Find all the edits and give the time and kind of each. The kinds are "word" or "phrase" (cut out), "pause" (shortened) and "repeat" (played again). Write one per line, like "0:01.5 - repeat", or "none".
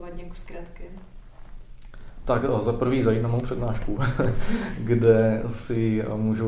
none